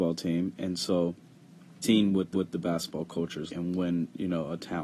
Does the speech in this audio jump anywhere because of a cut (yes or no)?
yes